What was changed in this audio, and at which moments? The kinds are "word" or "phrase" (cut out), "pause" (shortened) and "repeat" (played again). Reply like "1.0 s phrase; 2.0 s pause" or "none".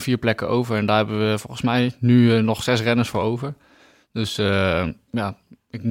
none